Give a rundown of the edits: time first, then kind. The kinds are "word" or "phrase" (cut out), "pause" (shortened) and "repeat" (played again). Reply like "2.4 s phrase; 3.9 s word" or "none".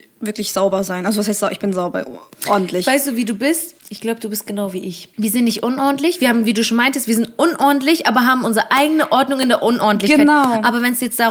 3.8 s pause; 5.1 s pause